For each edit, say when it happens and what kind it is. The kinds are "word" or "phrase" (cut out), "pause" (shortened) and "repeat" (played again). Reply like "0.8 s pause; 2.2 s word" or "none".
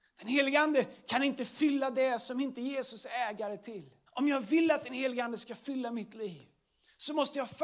4.1 s pause